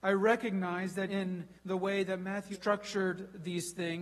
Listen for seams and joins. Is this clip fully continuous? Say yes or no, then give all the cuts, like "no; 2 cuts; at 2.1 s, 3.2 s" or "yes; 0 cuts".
no; 3 cuts; at 1.1 s, 1.6 s, 2.5 s